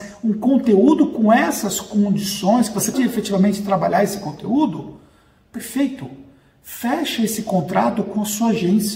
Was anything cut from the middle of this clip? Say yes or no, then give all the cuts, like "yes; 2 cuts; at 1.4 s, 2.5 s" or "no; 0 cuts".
yes; 1 cut; at 2.9 s